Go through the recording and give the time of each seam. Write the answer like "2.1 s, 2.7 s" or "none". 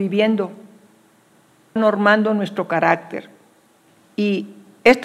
1.8 s